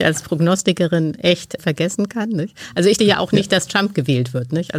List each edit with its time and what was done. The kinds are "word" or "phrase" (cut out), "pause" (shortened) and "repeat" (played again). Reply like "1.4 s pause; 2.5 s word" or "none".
1.6 s word; 3.0 s word